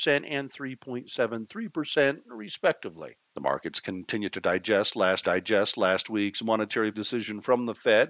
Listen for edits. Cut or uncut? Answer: cut